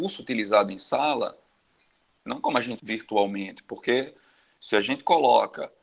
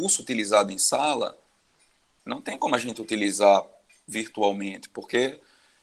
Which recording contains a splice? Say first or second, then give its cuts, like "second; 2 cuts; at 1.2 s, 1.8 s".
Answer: first; 2 cuts; at 2.4 s, 2.8 s